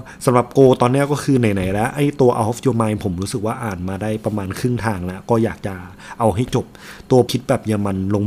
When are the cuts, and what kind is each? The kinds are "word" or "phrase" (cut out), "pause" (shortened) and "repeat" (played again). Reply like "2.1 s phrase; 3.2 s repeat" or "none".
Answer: 7.3 s word